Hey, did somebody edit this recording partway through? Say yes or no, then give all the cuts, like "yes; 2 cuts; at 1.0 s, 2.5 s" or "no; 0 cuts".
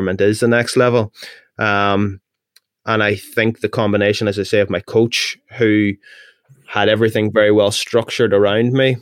no; 0 cuts